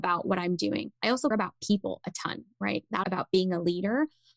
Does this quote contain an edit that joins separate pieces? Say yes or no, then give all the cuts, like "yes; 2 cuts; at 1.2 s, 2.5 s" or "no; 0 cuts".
yes; 3 cuts; at 1.0 s, 1.3 s, 3.0 s